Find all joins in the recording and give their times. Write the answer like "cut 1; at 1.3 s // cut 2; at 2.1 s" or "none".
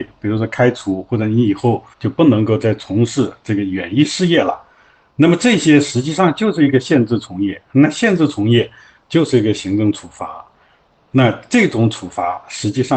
cut 1; at 1.9 s